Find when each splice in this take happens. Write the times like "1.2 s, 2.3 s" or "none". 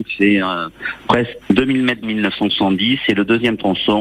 1.4 s, 2.0 s